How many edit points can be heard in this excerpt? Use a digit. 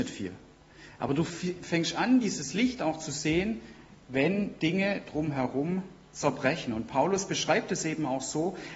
0